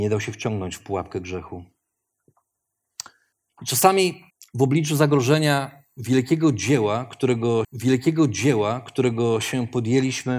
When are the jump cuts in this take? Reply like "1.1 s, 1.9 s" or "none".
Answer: 3.3 s, 4.3 s, 7.6 s